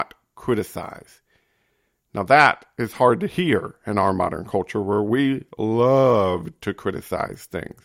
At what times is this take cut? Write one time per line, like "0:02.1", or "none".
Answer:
none

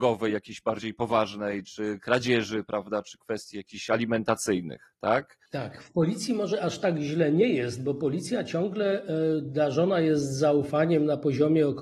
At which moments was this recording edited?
0:05.5

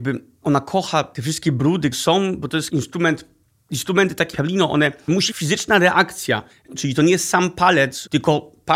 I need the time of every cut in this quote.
0:01.9
0:04.3
0:05.3

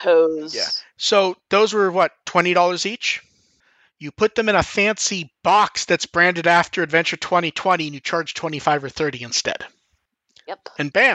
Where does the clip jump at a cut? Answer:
none

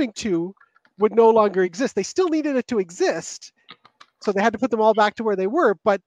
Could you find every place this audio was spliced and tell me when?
none

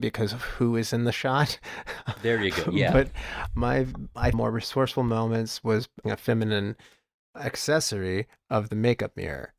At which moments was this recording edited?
0:02.2
0:04.3
0:06.0

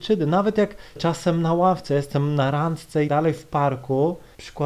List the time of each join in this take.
0:01.0
0:03.1

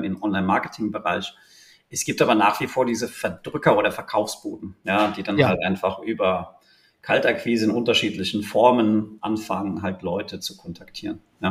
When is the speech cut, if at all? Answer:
none

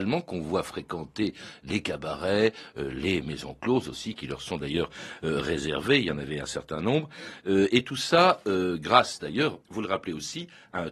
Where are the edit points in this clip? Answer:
0:09.6

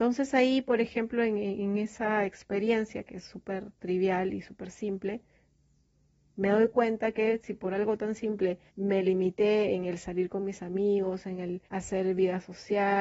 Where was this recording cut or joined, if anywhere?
0:08.7
0:11.7

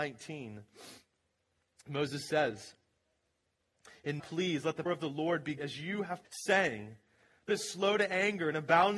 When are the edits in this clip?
0:04.2
0:04.9
0:05.6
0:06.2
0:07.5

